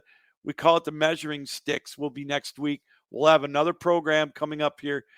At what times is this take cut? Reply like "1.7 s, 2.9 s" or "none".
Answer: none